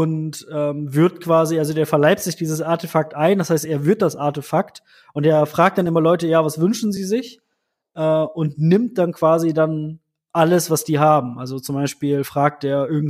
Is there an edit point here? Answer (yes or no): no